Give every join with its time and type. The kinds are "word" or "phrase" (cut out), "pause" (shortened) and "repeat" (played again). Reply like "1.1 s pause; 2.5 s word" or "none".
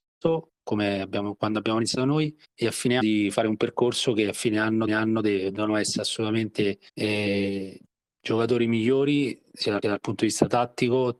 2.4 s pause; 3.0 s word; 4.9 s repeat; 6.9 s pause; 9.8 s repeat